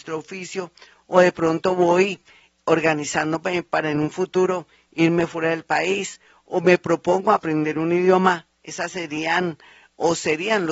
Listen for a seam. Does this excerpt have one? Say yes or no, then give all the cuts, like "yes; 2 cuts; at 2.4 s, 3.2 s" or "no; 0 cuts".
no; 0 cuts